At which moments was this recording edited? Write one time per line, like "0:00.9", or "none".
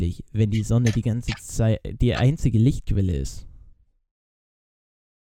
none